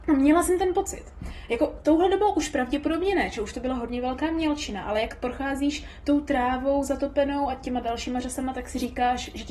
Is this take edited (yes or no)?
no